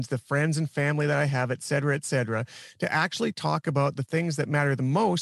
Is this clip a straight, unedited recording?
yes; 0 cuts

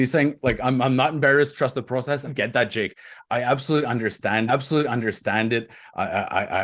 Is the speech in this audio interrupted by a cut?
yes; 2 cuts; at 2.3 s, 4.5 s

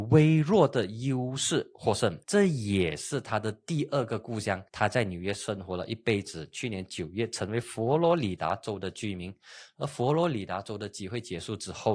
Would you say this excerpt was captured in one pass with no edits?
no; 2 cuts; at 2.2 s, 4.7 s

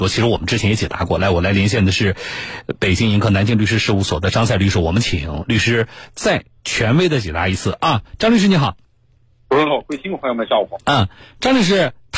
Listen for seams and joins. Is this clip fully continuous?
yes; 0 cuts

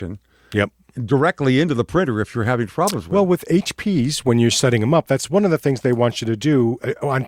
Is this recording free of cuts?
yes; 0 cuts

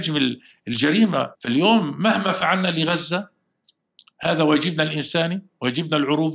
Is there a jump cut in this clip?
yes; 1 cut; at 1.3 s

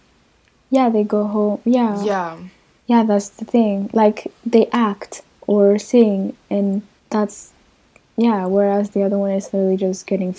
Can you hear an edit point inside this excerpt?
yes; 2 cuts; at 2.8 s, 7.0 s

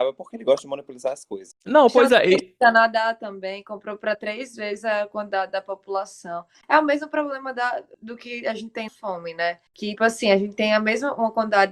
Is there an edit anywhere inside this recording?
yes; 2 cuts; at 8.9 s, 10.0 s

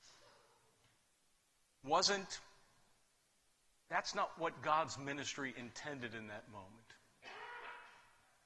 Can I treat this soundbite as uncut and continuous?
yes; 0 cuts

